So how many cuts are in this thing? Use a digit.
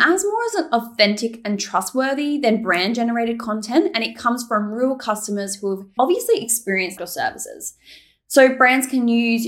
2